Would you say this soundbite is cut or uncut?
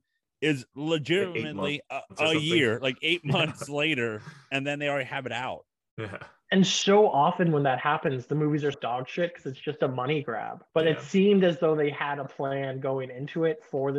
cut